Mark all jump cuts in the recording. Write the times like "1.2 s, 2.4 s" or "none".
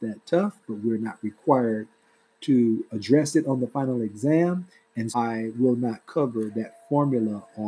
5.1 s